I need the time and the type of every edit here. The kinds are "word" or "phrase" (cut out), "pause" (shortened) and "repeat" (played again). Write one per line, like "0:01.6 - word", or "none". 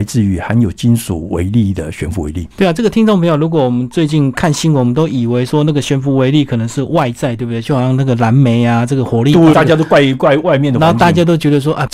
0:02.5 - pause
0:09.5 - word